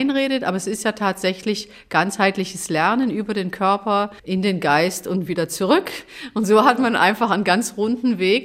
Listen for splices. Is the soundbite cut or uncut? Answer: cut